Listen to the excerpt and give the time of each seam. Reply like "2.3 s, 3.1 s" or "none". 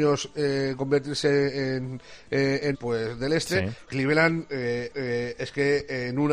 2.7 s, 3.9 s, 4.9 s